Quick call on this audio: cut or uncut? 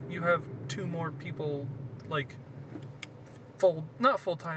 uncut